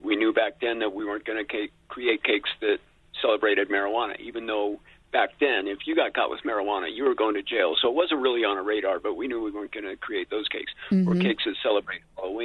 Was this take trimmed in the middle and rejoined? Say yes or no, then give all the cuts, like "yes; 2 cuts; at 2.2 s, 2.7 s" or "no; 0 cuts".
no; 0 cuts